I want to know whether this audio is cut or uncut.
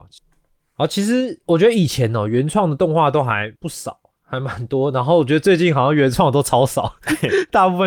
cut